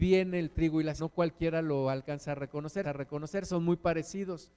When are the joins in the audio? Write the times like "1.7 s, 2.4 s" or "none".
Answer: 1.0 s, 2.8 s